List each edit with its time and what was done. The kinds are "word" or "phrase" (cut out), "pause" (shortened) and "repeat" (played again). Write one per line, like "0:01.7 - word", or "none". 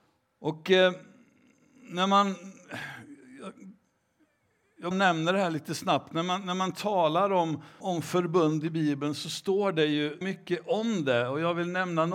0:04.9 - word
0:07.8 - word
0:10.2 - word